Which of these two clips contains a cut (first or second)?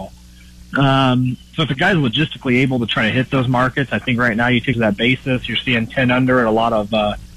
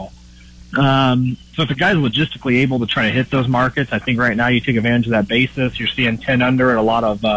first